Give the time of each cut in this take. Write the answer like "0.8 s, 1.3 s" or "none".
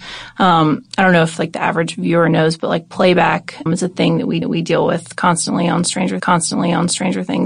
3.7 s, 4.4 s, 6.2 s